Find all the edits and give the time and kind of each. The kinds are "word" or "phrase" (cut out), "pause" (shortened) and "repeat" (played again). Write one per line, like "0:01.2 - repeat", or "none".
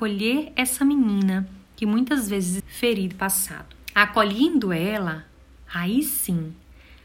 0:02.6 - phrase
0:03.1 - word
0:03.8 - pause